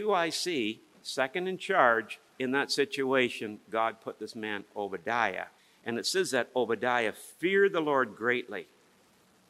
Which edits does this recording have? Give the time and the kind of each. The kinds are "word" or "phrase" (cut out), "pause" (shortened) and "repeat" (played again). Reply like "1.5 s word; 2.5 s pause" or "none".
2.3 s pause; 5.6 s pause